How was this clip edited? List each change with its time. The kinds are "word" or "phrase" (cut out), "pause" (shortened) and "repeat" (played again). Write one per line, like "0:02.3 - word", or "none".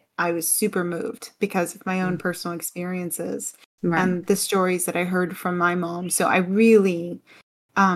none